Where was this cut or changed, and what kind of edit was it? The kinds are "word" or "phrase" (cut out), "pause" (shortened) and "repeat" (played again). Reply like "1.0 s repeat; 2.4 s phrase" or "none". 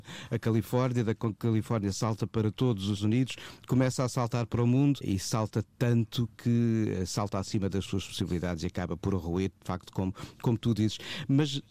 3.0 s word; 5.0 s word